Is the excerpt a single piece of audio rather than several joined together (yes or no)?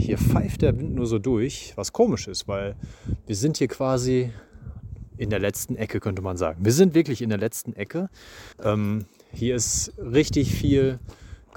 no